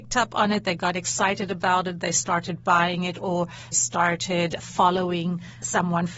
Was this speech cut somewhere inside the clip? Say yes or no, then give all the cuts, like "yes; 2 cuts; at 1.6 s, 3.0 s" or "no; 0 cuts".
yes; 1 cut; at 3.7 s